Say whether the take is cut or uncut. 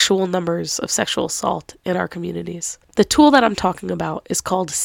uncut